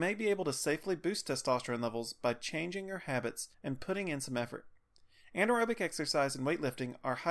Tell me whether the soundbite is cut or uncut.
cut